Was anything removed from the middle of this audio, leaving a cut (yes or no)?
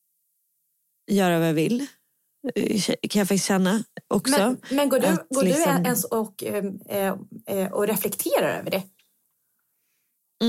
no